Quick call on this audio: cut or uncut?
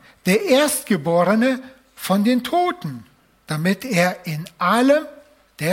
uncut